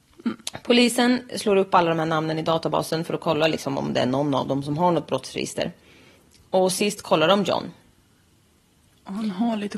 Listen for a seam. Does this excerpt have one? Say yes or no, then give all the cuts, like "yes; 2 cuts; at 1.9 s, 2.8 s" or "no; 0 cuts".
no; 0 cuts